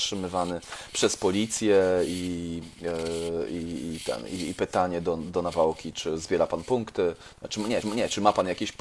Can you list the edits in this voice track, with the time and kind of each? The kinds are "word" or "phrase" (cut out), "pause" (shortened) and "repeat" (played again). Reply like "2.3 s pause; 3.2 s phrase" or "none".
7.8 s repeat